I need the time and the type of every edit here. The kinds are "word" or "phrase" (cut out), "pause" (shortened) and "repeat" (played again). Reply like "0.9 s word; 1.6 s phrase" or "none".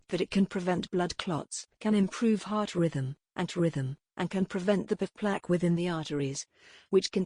1.7 s pause; 3.5 s repeat; 5.0 s word